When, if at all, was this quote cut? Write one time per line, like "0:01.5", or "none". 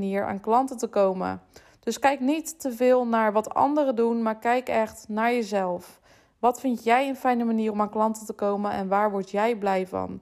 none